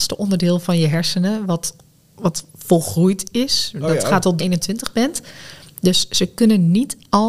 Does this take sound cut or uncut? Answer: cut